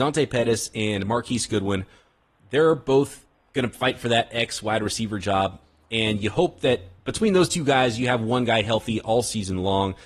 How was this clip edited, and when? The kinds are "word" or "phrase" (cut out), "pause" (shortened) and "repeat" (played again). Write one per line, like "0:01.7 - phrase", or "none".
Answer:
none